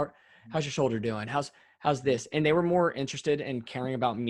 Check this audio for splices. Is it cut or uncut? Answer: uncut